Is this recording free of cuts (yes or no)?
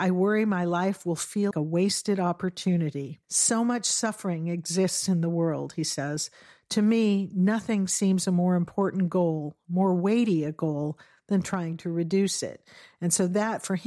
no